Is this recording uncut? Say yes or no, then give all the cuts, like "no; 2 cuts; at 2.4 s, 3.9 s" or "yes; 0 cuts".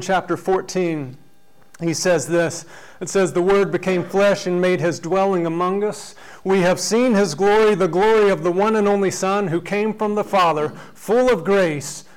yes; 0 cuts